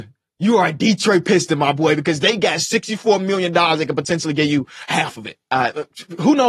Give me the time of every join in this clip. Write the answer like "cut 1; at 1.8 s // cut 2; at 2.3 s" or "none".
cut 1; at 5.4 s